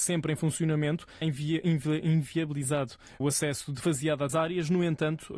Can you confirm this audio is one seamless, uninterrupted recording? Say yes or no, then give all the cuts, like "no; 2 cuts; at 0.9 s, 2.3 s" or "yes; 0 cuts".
no; 4 cuts; at 1.2 s, 3.2 s, 3.8 s, 4.3 s